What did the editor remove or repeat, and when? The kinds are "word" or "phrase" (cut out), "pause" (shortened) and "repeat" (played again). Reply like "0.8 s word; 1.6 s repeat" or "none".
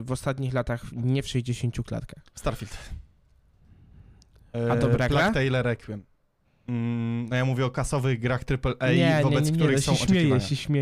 none